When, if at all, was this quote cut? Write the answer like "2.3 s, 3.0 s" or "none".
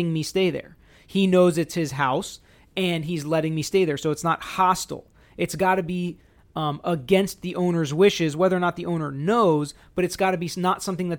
none

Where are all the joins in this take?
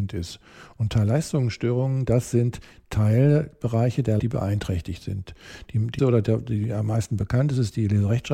4.2 s, 6.0 s

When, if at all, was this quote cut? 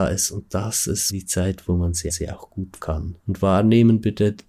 1.1 s, 2.1 s, 2.8 s, 3.2 s

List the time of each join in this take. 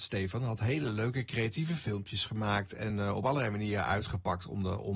none

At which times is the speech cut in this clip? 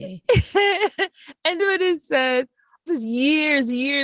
1.6 s, 2.0 s, 2.9 s

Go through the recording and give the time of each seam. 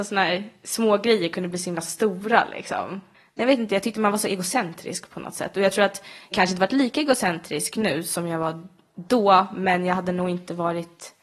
6.3 s

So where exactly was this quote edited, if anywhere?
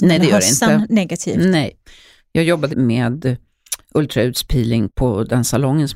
2.7 s, 4.9 s

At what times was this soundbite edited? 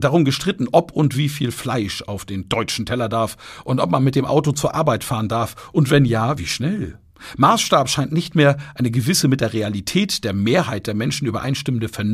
none

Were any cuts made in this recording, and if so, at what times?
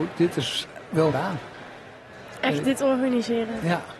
1.1 s

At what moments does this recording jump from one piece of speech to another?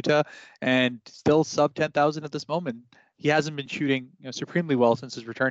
none

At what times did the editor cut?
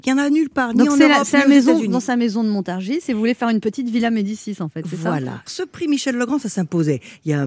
5.5 s

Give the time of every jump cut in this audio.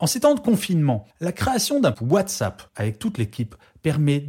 1.1 s, 1.9 s, 2.7 s

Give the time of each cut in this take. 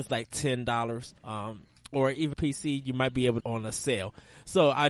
1.2 s, 2.3 s, 3.4 s

